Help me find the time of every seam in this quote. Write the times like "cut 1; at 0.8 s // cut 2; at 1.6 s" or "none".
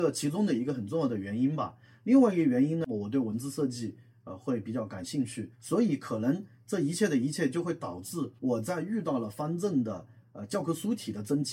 cut 1; at 5.5 s // cut 2; at 8.4 s